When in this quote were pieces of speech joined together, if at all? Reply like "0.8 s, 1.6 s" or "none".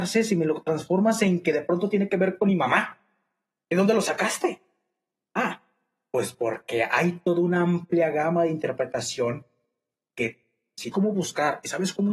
10.9 s